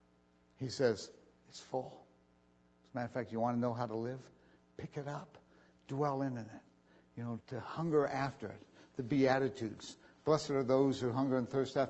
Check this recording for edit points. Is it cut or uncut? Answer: cut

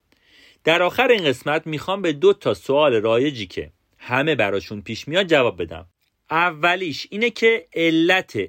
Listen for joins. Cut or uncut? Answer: uncut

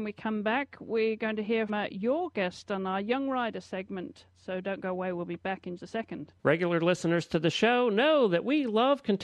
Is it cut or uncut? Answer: cut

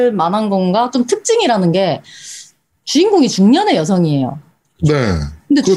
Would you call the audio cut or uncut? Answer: uncut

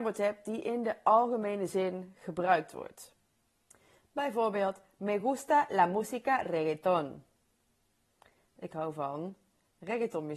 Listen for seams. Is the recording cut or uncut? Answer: uncut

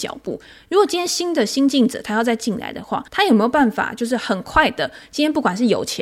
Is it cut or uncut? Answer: cut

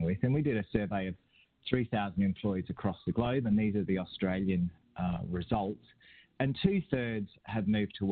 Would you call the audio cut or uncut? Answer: uncut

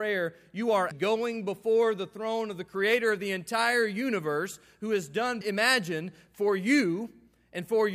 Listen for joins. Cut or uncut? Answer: cut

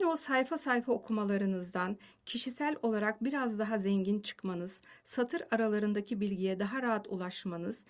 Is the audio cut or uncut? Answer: uncut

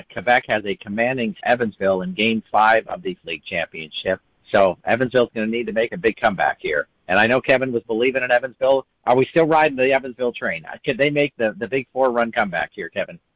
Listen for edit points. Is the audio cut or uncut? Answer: cut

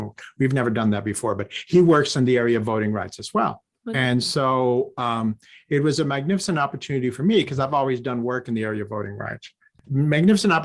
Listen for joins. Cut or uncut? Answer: uncut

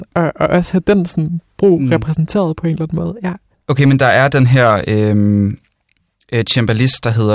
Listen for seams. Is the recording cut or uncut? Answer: uncut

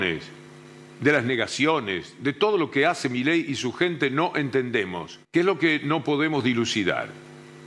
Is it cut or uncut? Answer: cut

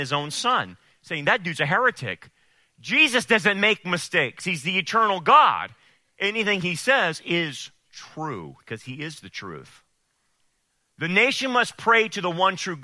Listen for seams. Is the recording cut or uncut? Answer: uncut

